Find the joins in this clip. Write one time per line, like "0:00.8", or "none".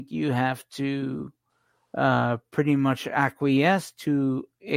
none